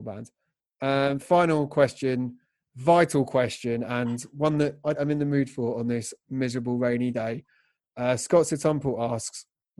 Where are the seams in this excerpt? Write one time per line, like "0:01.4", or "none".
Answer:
0:05.0